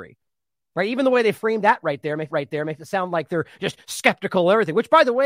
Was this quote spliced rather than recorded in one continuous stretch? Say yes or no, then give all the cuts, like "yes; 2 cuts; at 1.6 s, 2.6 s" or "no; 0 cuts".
yes; 1 cut; at 2.3 s